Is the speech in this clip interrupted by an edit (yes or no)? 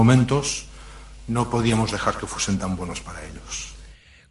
no